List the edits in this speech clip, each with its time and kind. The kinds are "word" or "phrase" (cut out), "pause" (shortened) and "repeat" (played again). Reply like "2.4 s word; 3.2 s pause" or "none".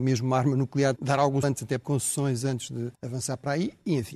1.0 s phrase; 1.4 s word; 1.8 s phrase; 2.9 s pause